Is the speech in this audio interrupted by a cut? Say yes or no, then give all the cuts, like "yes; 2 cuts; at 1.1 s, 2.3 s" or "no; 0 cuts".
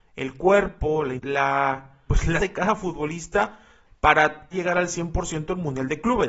yes; 4 cuts; at 1.2 s, 2.1 s, 2.4 s, 4.5 s